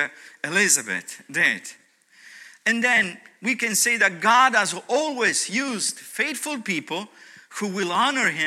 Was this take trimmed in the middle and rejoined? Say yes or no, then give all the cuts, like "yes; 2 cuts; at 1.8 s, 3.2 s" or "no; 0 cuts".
no; 0 cuts